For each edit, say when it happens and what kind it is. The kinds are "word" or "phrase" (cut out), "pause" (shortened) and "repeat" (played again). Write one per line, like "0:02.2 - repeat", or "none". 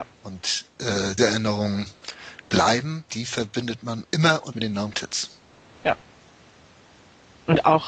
0:01.2 - word
0:03.1 - word
0:04.0 - word
0:04.5 - word
0:04.9 - word